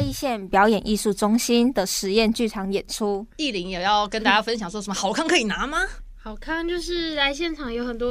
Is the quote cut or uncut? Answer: cut